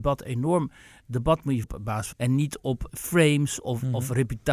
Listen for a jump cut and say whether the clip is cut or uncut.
cut